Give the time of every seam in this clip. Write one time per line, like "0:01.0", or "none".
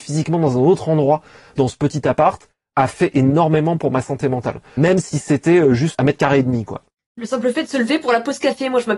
none